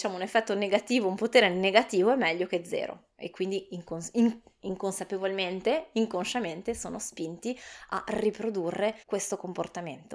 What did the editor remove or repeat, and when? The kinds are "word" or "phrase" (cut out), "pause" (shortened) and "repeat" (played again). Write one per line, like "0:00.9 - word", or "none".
0:03.1 - pause
0:09.0 - pause